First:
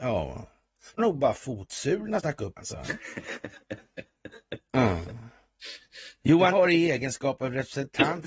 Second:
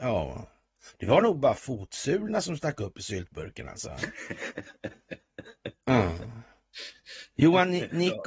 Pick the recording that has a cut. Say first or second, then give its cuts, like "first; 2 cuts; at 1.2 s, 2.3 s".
first; 4 cuts; at 1.0 s, 2.2 s, 2.6 s, 6.5 s